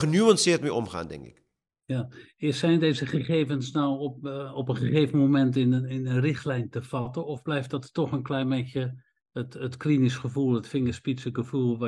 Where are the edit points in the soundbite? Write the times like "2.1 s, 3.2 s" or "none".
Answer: none